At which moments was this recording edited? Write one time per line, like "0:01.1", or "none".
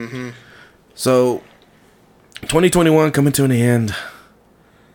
none